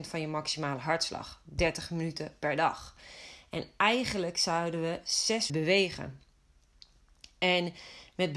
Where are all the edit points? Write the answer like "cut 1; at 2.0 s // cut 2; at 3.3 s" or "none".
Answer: cut 1; at 5.5 s